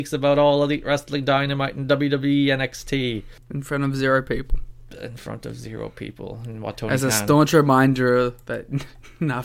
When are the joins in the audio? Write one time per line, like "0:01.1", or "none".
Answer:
none